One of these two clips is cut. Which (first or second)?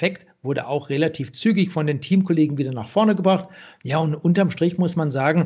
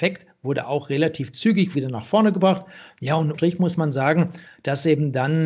second